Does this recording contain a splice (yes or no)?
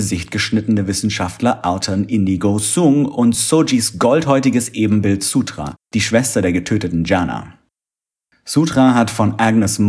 no